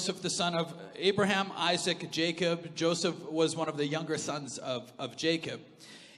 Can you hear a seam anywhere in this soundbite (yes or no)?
no